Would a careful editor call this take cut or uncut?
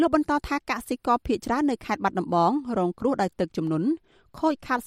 uncut